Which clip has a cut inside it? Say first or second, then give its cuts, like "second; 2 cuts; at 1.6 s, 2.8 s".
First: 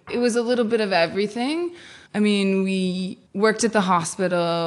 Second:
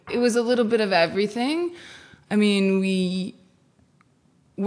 first; 2 cuts; at 2.1 s, 3.3 s